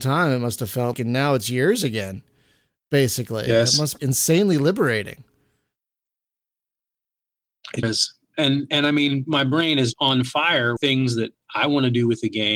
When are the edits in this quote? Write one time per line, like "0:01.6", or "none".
0:00.9
0:04.0
0:07.8
0:09.9
0:10.8